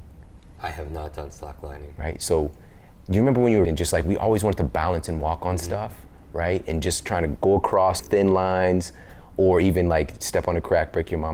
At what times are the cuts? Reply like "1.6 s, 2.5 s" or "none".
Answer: 3.6 s, 7.4 s, 8.0 s